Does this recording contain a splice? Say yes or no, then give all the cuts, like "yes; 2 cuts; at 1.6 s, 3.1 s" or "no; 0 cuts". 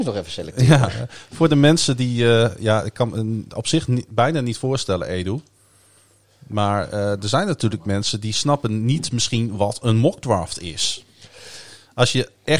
no; 0 cuts